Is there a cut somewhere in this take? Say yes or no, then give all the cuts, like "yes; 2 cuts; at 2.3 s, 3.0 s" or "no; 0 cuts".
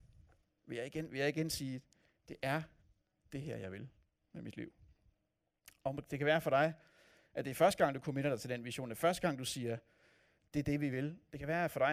no; 0 cuts